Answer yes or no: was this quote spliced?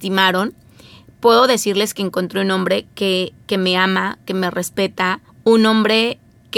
yes